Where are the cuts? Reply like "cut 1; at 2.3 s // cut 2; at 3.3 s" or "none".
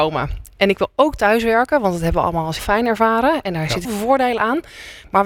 cut 1; at 2.6 s // cut 2; at 3.8 s